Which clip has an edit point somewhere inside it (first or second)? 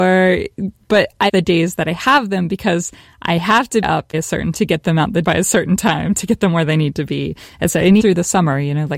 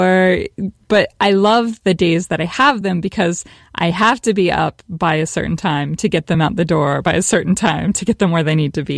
first